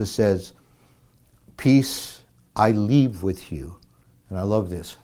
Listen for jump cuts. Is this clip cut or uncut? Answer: uncut